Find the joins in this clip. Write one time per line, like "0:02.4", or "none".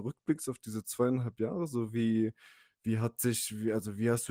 none